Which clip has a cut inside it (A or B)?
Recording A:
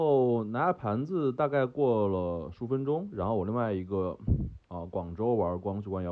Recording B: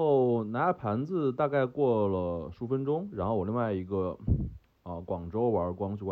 A